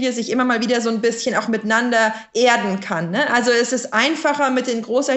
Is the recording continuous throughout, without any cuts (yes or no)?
yes